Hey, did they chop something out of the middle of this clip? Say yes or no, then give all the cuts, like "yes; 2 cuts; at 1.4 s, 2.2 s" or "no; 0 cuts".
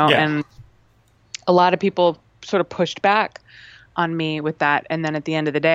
no; 0 cuts